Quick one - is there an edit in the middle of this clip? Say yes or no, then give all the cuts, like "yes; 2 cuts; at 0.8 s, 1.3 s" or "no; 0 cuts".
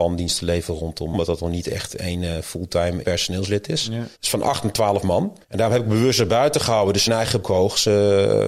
yes; 6 cuts; at 1.1 s, 3.0 s, 4.1 s, 5.4 s, 7.1 s, 7.4 s